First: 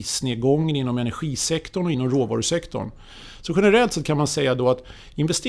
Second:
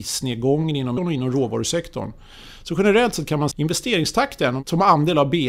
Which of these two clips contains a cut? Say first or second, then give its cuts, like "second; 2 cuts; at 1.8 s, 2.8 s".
second; 2 cuts; at 1.0 s, 3.5 s